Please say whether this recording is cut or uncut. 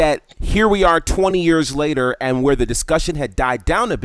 uncut